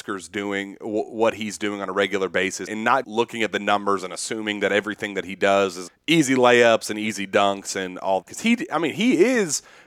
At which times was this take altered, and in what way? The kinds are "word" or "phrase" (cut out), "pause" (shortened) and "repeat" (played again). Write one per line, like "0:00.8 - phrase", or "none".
0:02.7 - word
0:03.0 - word
0:05.9 - word
0:08.2 - word